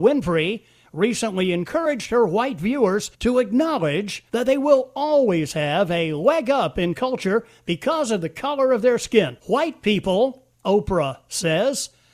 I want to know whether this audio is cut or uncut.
cut